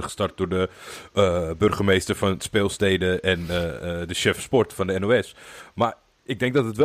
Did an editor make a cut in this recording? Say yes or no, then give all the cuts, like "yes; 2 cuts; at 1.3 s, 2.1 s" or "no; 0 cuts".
no; 0 cuts